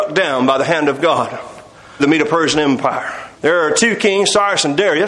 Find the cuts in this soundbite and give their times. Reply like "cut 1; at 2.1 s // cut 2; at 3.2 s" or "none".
cut 1; at 2.0 s // cut 2; at 3.3 s

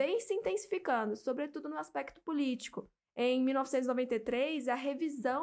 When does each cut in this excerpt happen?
none

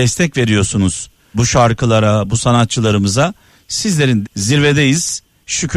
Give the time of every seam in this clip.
cut 1; at 1.3 s // cut 2; at 4.2 s

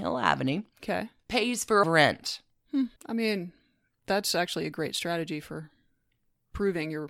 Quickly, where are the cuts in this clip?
cut 1; at 1.2 s // cut 2; at 1.8 s // cut 3; at 3.0 s

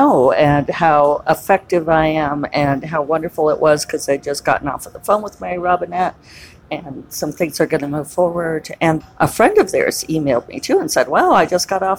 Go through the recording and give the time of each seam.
cut 1; at 9.0 s

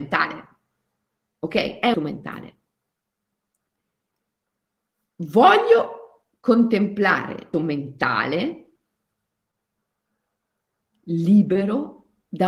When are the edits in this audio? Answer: cut 1; at 1.9 s // cut 2; at 7.5 s

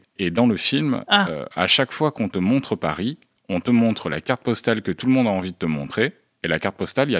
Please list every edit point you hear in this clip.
none

